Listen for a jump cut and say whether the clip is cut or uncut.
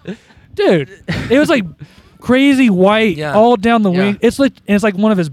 uncut